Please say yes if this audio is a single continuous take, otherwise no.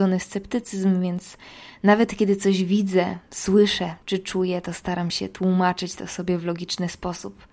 yes